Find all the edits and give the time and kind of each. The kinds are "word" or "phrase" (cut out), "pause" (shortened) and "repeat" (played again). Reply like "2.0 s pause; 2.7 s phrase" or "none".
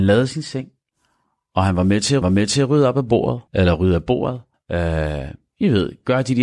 0.9 s pause; 2.2 s repeat; 3.5 s pause; 4.5 s pause